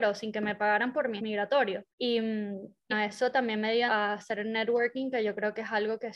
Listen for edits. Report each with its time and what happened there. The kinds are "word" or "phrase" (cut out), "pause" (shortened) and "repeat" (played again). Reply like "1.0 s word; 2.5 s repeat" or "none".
1.2 s word; 1.9 s pause; 2.9 s word; 3.9 s word